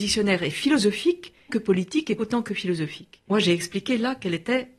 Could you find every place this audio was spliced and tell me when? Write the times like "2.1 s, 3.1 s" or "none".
1.5 s, 2.2 s, 3.3 s